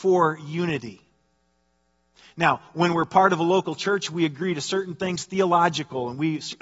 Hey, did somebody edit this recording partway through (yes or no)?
no